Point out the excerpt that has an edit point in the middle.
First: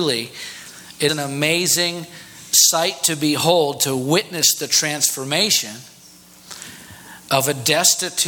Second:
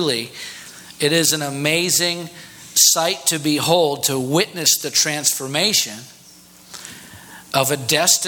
first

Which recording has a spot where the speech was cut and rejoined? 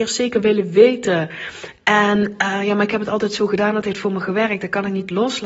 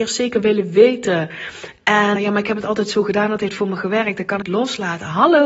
second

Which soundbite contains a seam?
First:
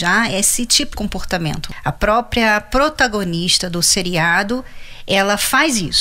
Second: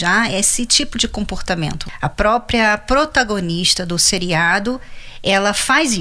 first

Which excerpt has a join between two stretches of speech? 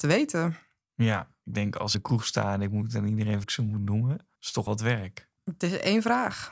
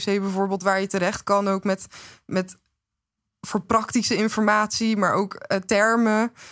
first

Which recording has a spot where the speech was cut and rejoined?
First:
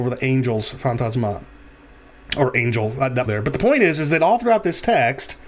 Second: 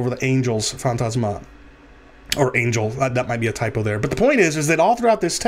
first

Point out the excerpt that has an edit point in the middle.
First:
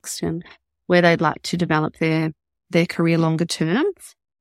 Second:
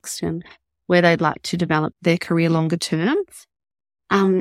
second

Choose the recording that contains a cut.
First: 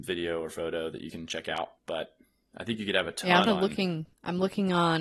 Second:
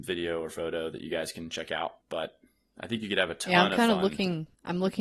first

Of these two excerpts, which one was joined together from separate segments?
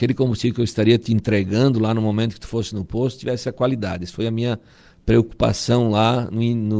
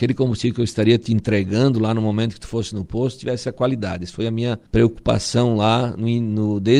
second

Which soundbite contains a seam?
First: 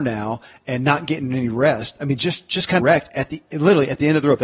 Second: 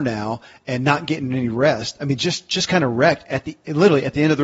first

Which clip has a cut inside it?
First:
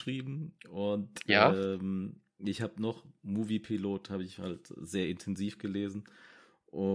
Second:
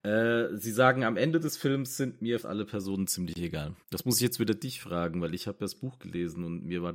second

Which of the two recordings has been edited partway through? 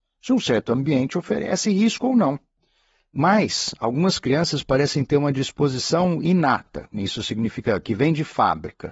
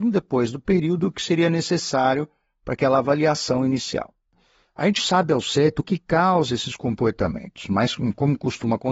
second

